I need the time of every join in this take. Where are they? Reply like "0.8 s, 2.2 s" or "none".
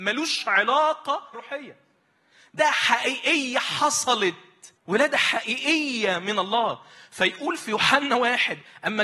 1.3 s, 2.6 s, 4.8 s